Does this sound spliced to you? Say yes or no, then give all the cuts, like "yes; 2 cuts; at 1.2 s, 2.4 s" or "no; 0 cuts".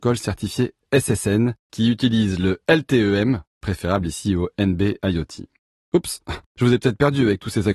yes; 1 cut; at 6.5 s